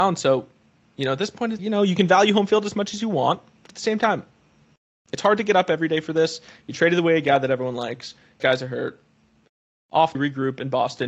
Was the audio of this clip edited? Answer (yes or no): yes